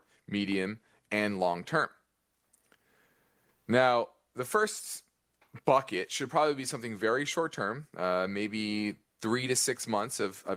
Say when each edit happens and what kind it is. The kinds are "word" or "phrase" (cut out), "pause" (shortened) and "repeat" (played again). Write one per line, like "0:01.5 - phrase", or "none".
none